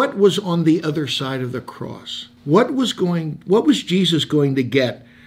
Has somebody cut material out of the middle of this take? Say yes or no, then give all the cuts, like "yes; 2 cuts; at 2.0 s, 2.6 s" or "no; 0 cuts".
yes; 1 cut; at 2.4 s